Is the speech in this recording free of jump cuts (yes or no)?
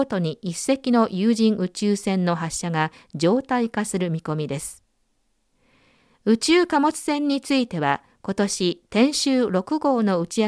yes